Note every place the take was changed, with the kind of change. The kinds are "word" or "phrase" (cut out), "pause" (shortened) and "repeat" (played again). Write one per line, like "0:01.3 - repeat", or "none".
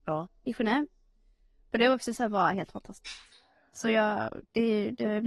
none